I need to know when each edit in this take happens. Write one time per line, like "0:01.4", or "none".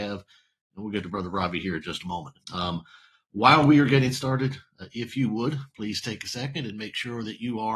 0:02.4